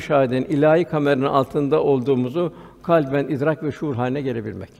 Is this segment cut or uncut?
uncut